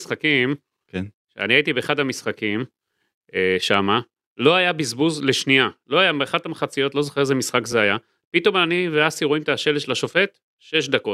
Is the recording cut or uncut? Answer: uncut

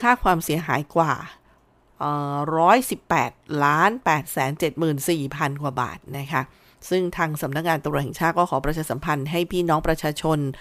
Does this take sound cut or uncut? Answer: uncut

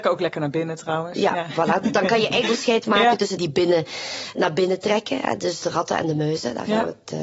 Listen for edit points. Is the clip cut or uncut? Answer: cut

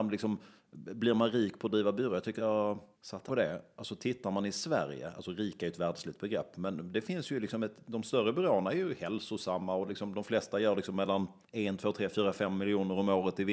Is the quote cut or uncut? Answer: cut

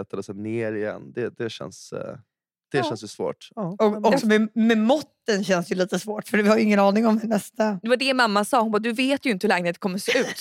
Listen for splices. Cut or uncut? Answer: uncut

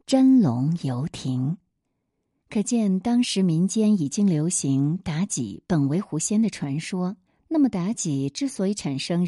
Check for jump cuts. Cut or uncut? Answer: cut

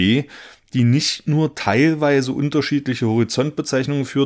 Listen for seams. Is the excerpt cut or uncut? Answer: uncut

